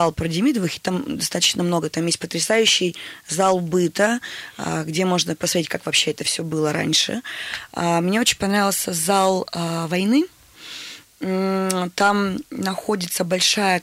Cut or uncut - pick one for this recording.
uncut